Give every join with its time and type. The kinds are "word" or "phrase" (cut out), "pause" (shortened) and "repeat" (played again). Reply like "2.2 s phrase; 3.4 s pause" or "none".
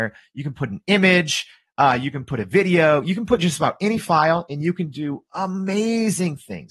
none